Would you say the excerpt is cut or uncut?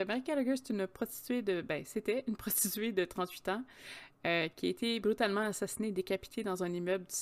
uncut